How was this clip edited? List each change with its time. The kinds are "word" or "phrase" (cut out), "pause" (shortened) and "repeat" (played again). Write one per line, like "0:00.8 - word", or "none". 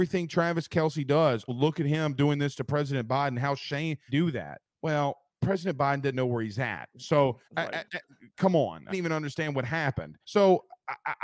0:01.5 - word
0:04.1 - phrase
0:04.7 - pause
0:06.1 - word
0:07.4 - pause
0:08.9 - phrase
0:10.2 - pause